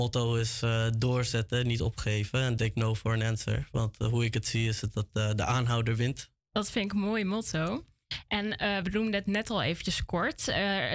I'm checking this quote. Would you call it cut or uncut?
cut